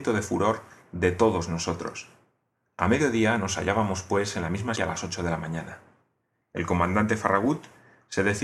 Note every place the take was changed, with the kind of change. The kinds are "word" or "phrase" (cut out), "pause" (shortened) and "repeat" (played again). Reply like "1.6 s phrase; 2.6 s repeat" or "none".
4.8 s word